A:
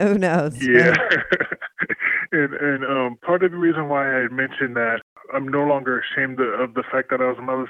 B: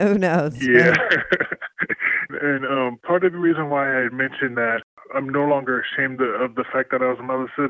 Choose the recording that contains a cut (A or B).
B